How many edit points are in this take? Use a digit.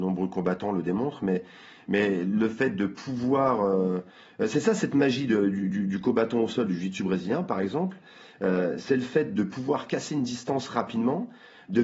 0